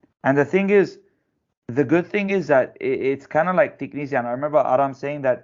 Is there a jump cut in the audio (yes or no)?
no